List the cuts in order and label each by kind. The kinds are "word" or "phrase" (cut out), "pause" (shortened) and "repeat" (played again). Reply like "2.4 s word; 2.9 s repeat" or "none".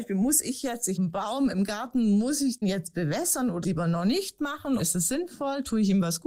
1.0 s word; 2.6 s word; 3.6 s phrase; 4.8 s word